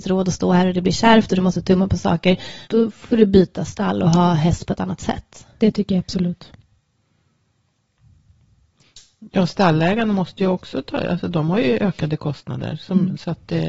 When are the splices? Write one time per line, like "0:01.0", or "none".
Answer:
0:02.6